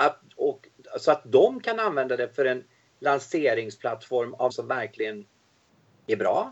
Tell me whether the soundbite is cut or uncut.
cut